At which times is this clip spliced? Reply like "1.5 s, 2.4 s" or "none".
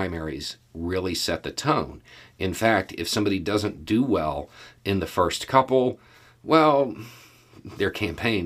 none